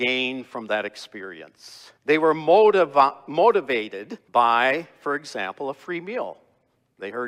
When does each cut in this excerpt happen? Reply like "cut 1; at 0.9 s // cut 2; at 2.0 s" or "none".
cut 1; at 2.0 s // cut 2; at 4.3 s